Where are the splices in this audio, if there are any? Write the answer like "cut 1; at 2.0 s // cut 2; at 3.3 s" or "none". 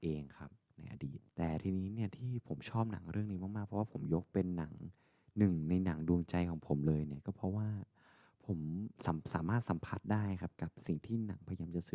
cut 1; at 1.3 s // cut 2; at 9.0 s